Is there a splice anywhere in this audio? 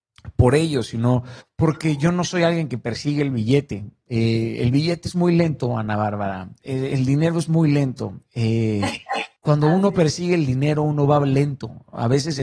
yes; 2 cuts; at 1.4 s, 9.4 s

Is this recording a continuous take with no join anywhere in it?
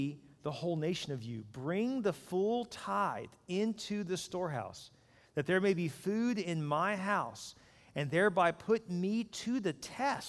yes; 0 cuts

